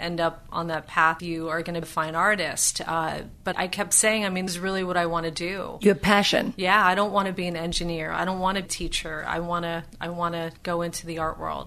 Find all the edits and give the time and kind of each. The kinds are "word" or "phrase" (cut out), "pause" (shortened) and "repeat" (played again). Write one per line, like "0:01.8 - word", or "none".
0:01.2 - word
0:01.8 - word
0:03.5 - word
0:04.5 - word
0:08.7 - phrase
0:10.6 - pause

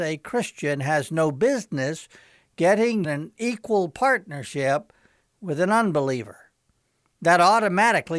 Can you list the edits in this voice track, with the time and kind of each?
0:03.0 - phrase

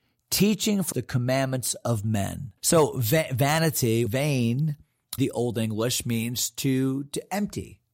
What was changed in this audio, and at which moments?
0:00.9 - word
0:02.6 - pause
0:04.1 - phrase
0:05.2 - phrase

